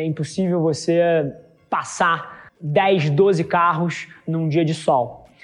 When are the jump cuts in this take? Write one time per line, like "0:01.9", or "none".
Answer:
0:02.5